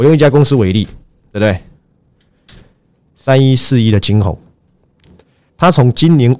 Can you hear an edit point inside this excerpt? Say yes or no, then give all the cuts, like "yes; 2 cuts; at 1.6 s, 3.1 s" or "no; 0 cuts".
no; 0 cuts